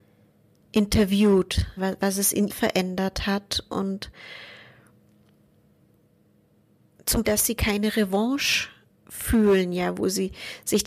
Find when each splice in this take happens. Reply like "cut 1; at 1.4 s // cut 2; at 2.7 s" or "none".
cut 1; at 1.8 s // cut 2; at 2.5 s // cut 3; at 7.2 s // cut 4; at 8.9 s